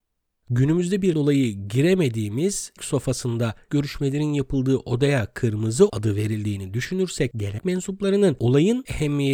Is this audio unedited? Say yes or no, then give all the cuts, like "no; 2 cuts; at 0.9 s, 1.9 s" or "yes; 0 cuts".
no; 5 cuts; at 1.1 s, 2.8 s, 3.7 s, 5.9 s, 7.6 s